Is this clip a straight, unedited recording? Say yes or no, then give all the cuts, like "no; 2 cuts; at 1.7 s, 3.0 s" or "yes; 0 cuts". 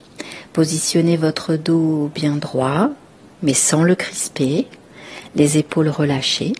yes; 0 cuts